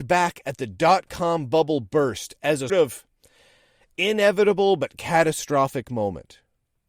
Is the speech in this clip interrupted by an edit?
yes; 1 cut; at 2.7 s

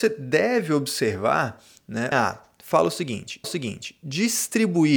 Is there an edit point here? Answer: yes; 2 cuts; at 2.1 s, 3.4 s

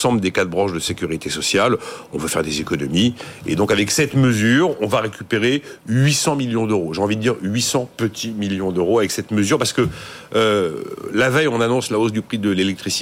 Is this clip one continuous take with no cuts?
yes; 0 cuts

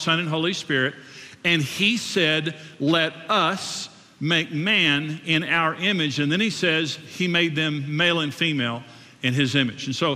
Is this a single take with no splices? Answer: yes; 0 cuts

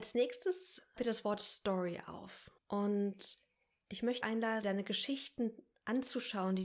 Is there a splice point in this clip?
yes; 4 cuts; at 1.0 s, 2.6 s, 4.2 s, 4.6 s

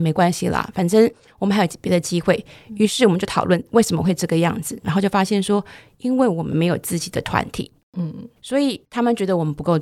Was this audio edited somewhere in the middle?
no; 0 cuts

